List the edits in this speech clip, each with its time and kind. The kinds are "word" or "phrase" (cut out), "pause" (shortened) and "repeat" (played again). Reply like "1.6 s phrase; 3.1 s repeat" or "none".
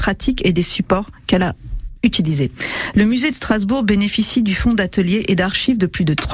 none